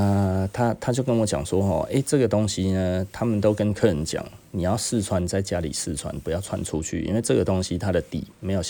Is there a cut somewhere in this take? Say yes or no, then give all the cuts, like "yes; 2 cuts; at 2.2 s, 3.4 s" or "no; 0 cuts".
no; 0 cuts